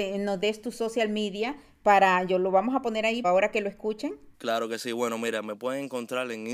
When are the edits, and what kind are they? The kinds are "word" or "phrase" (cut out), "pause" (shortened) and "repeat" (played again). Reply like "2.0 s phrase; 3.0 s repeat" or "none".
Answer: 3.2 s word; 4.3 s pause